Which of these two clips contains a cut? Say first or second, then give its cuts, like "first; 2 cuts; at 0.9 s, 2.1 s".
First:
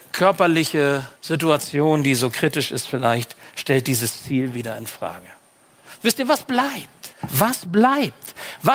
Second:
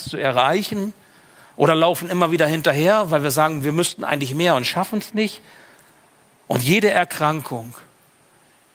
first; 2 cuts; at 1.2 s, 7.1 s